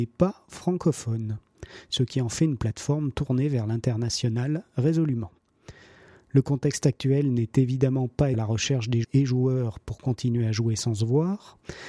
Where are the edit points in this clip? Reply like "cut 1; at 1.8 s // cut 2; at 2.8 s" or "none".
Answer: cut 1; at 8.3 s // cut 2; at 9.0 s